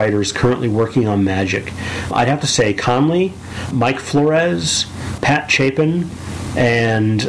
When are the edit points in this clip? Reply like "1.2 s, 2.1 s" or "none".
2.1 s, 3.7 s, 5.2 s